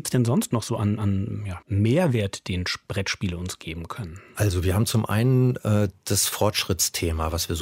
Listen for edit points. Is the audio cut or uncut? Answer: uncut